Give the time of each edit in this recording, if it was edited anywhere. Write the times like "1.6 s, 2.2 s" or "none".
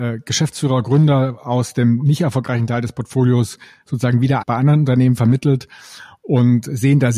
4.4 s